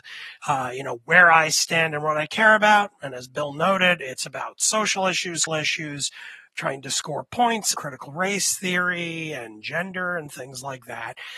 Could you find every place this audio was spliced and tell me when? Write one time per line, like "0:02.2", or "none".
0:05.5
0:07.7